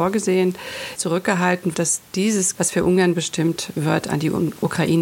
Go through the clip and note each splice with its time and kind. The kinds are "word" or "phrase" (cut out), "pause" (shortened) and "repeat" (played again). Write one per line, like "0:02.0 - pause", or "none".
0:01.0 - word
0:01.7 - word
0:02.5 - word